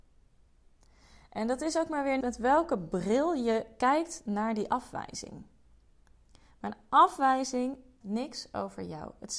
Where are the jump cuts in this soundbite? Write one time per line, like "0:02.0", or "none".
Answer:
0:02.2
0:08.0

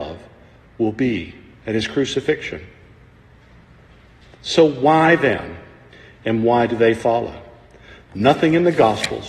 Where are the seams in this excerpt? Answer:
none

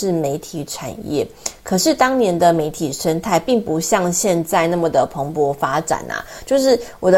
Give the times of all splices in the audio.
none

